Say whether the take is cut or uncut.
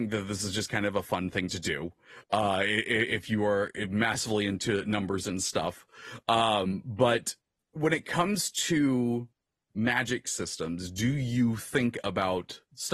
uncut